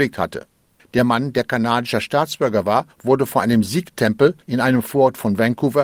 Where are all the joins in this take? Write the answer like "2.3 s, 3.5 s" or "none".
2.9 s, 4.4 s